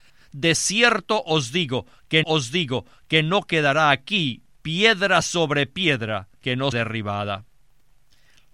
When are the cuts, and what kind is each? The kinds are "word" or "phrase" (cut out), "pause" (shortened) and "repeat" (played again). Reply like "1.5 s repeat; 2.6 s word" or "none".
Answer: 2.2 s repeat; 6.3 s pause; 6.7 s word